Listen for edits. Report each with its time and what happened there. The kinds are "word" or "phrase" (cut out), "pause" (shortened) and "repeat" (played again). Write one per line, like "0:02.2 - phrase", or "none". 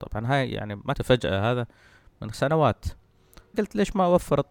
0:00.9 - word
0:02.3 - word
0:03.5 - word